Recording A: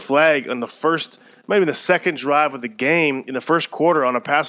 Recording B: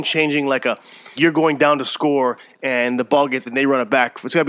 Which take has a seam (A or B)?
B